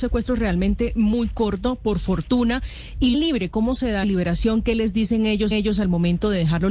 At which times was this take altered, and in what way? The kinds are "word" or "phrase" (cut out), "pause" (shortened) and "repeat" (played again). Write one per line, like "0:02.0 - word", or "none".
0:03.1 - phrase
0:04.0 - phrase
0:05.5 - repeat